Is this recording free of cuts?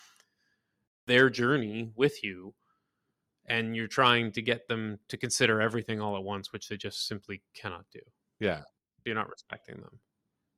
yes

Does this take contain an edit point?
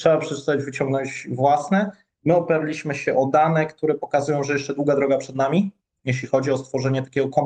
no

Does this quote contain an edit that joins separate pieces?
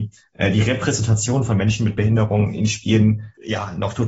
no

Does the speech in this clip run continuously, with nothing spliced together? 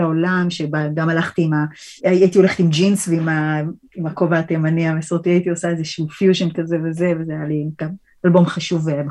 no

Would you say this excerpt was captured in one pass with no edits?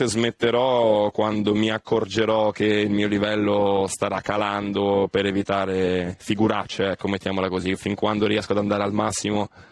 yes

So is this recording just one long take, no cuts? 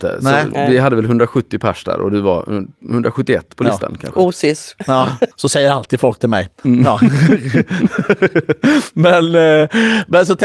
no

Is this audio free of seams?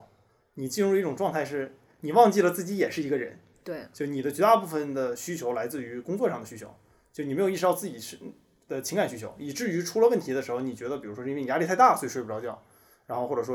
yes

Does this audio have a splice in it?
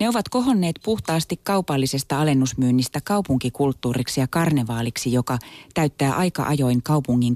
no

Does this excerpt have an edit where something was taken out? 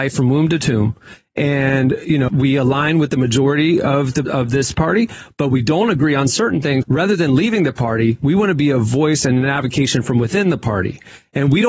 yes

